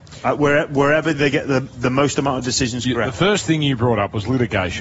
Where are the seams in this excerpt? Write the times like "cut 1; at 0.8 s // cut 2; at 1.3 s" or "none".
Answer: none